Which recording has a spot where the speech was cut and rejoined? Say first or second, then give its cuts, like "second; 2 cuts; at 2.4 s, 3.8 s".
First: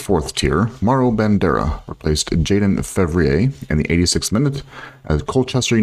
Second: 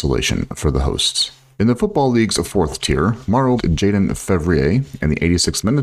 second; 1 cut; at 3.6 s